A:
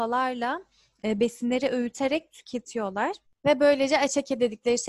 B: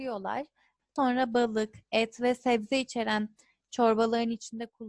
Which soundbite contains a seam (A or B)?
A